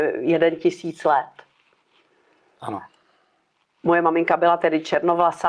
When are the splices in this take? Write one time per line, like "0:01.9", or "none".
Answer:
none